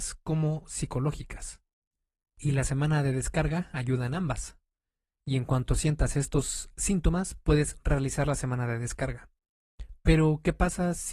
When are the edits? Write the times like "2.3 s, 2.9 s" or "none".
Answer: none